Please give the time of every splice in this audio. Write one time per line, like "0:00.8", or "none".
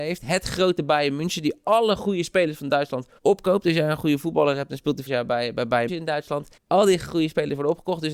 0:03.2
0:05.1
0:05.9
0:06.6